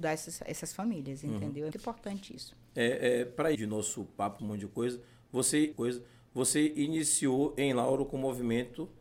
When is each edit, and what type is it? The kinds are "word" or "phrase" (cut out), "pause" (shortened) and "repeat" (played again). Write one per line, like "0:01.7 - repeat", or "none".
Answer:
0:01.7 - word
0:03.5 - word
0:04.4 - phrase
0:05.7 - repeat